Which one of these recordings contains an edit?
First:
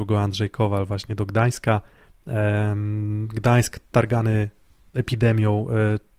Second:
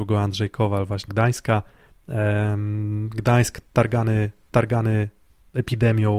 second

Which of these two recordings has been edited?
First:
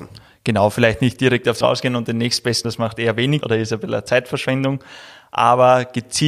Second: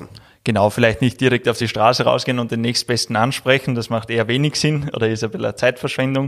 first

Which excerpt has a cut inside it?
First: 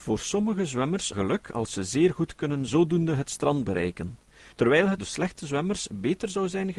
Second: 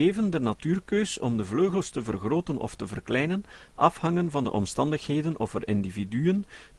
first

